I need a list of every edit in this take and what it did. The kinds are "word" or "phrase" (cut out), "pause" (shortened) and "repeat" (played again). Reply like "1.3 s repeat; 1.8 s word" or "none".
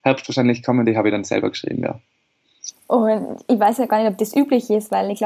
2.8 s pause